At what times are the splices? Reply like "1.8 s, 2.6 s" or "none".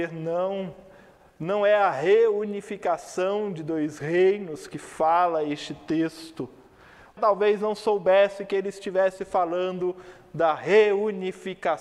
7.2 s